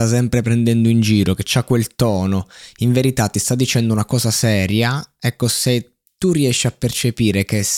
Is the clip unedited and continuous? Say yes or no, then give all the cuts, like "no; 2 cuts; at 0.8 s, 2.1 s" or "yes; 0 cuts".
yes; 0 cuts